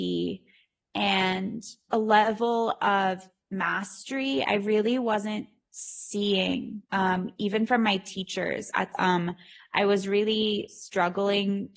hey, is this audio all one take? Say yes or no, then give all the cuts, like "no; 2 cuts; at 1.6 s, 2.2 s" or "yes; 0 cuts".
no; 4 cuts; at 1.9 s, 4.5 s, 6.9 s, 8.9 s